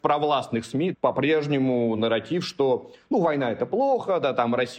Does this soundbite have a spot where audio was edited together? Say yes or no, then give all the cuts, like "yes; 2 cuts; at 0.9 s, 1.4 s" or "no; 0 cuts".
no; 0 cuts